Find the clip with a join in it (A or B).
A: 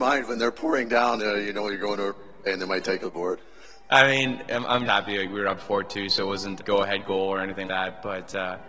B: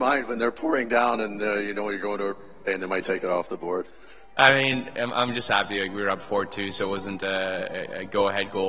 A